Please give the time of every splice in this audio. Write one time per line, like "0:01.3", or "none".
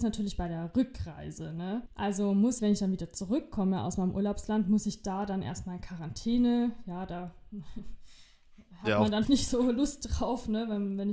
0:02.6
0:09.2